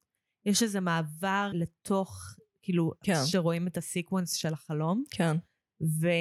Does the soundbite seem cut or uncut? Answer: cut